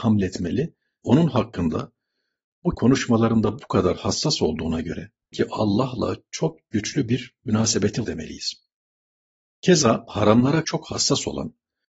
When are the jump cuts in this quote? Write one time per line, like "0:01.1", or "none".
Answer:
0:01.0
0:02.7
0:05.3
0:08.0
0:10.6